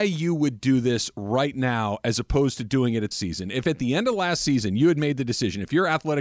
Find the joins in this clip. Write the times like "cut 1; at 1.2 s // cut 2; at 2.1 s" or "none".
cut 1; at 3.1 s